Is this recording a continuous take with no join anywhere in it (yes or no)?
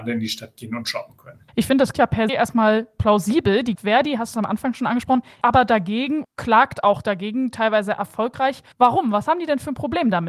no